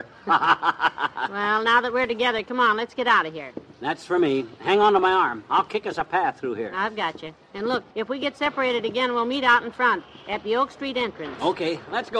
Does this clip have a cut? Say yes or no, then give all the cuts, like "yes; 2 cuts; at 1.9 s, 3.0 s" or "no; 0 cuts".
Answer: yes; 1 cut; at 7.9 s